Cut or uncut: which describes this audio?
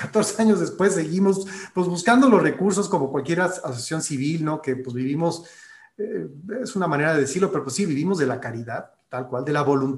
uncut